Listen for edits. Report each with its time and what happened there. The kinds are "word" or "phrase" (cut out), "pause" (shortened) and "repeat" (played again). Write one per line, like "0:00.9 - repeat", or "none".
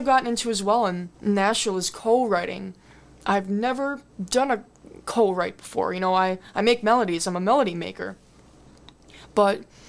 0:01.1 - pause